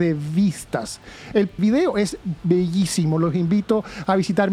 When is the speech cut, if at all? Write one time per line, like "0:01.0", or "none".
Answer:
0:01.6